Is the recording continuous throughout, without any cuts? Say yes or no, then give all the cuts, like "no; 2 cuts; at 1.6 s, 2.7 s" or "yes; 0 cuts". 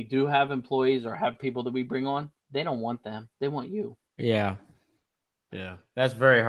no; 3 cuts; at 2.4 s, 3.3 s, 4.1 s